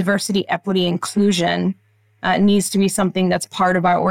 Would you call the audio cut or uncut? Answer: uncut